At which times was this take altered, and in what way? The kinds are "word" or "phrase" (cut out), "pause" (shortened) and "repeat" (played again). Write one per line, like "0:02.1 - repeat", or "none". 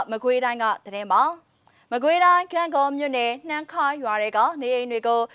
0:01.7 - pause